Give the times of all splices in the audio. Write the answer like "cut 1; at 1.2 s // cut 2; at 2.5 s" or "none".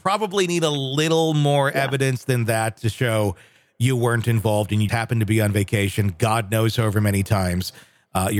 cut 1; at 4.9 s